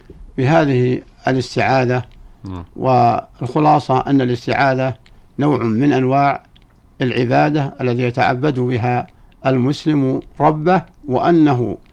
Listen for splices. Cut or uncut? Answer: cut